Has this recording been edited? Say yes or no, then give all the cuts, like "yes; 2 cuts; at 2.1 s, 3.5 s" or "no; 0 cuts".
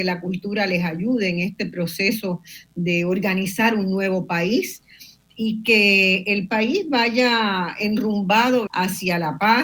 yes; 1 cut; at 8.7 s